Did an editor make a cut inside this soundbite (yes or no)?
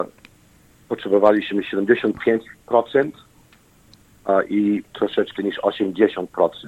yes